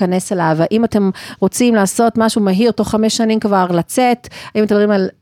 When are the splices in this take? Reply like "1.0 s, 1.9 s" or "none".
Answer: none